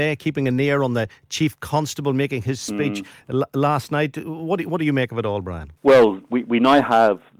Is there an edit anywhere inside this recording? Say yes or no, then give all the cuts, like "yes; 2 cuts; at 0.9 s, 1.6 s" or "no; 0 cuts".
yes; 1 cut; at 5.8 s